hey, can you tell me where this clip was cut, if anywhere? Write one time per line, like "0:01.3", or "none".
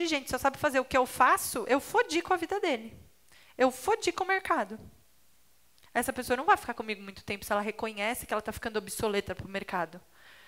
none